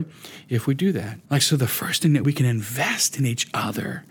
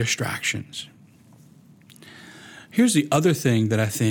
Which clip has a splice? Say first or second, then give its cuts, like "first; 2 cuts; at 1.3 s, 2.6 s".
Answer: first; 2 cuts; at 1.3 s, 2.2 s